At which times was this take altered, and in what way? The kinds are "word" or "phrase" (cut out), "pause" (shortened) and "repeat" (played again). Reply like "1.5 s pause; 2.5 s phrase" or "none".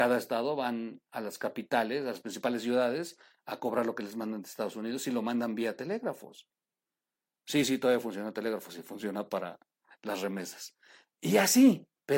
none